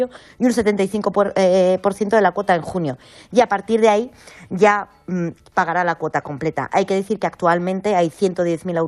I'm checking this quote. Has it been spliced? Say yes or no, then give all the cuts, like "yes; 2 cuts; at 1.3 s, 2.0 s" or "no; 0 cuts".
no; 0 cuts